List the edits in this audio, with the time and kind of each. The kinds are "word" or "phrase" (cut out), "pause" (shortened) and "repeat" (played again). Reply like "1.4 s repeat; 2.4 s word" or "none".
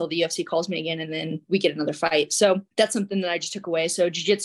2.7 s pause